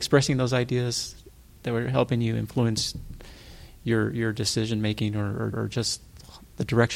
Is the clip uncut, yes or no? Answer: no